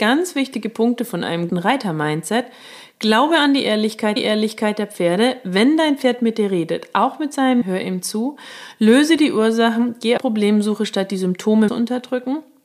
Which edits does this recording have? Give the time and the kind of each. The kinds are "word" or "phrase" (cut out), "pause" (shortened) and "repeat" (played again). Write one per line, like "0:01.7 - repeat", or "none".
0:01.5 - word
0:04.2 - repeat
0:07.6 - word
0:10.2 - word
0:11.7 - phrase